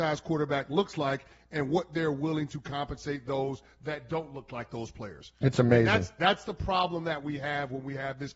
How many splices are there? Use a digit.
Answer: 0